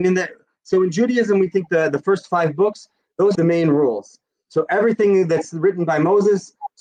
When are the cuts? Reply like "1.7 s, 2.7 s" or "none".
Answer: 3.3 s